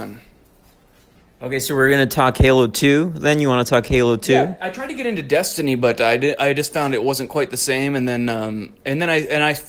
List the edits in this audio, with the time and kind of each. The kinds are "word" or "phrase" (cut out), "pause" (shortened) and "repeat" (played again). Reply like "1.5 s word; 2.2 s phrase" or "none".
none